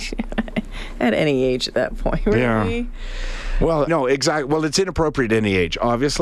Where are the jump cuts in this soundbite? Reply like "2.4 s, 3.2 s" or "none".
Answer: 3.9 s